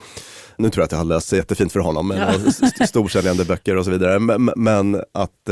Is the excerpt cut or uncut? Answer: uncut